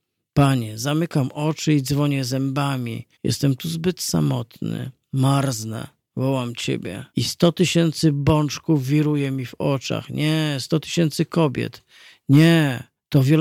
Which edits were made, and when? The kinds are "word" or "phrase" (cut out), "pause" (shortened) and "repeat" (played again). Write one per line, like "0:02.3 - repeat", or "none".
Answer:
0:03.1 - pause
0:06.1 - pause
0:07.1 - pause